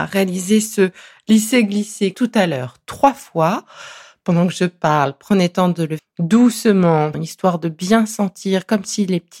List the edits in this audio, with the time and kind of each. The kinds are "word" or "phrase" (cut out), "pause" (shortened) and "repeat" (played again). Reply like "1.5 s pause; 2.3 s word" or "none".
2.1 s word; 6.0 s word; 7.1 s word

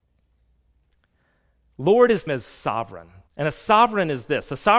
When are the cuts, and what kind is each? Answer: 2.3 s word; 3.3 s pause

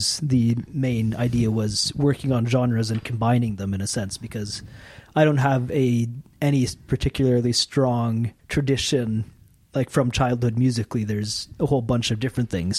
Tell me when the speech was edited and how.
8.4 s pause

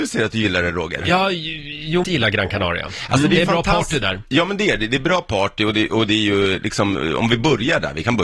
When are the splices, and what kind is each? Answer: 2.0 s phrase

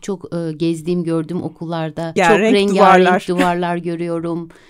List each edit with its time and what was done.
2.2 s word

